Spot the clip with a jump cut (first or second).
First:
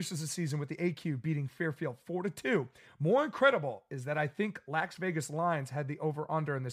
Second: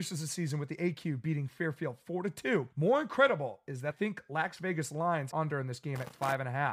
second